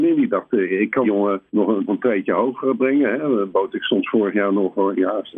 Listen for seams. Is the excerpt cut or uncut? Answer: cut